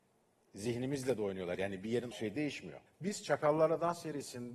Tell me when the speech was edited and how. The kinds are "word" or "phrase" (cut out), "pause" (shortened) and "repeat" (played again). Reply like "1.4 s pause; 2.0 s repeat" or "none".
2.1 s phrase; 2.9 s pause

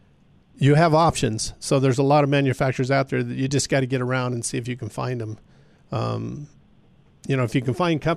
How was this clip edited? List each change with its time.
none

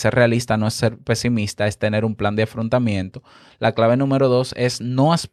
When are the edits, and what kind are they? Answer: none

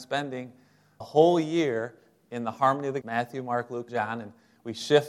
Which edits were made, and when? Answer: 1.0 s word; 3.0 s word; 3.9 s word

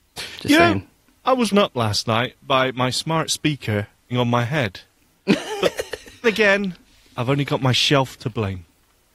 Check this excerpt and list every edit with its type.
1.5 s word; 4.1 s word; 6.2 s word

